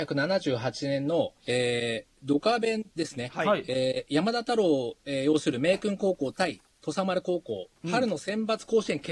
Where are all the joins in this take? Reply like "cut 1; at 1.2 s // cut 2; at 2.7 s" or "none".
cut 1; at 1.4 s // cut 2; at 2.9 s // cut 3; at 7.8 s